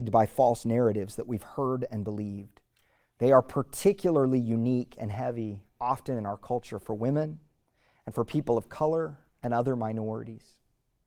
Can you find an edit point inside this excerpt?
no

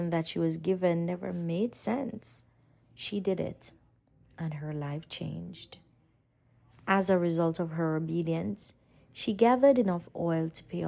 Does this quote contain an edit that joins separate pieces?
no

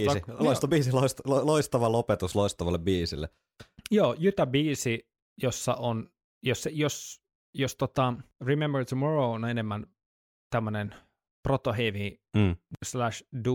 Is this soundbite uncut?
yes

